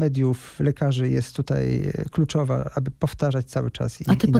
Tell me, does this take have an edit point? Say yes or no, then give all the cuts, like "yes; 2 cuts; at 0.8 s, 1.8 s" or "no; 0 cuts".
no; 0 cuts